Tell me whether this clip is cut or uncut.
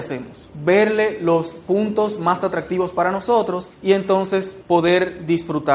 uncut